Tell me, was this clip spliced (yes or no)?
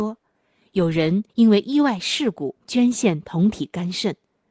yes